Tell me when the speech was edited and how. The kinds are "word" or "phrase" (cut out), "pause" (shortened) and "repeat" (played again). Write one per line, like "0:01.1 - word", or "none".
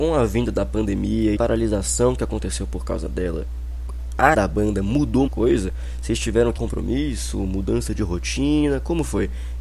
0:01.4 - phrase
0:04.3 - word
0:05.3 - word
0:06.6 - word